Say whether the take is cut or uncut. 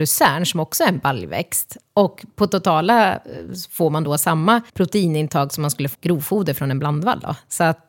cut